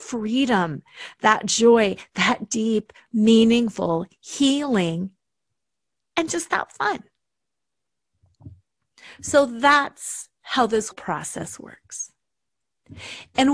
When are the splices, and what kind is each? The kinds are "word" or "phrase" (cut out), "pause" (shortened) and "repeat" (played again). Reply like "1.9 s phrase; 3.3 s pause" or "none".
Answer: 10.9 s word